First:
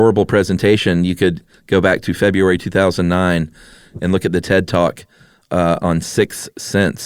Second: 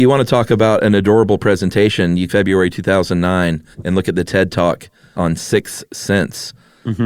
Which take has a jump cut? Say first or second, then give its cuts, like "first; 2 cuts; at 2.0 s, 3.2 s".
second; 3 cuts; at 2.3 s, 3.7 s, 5.1 s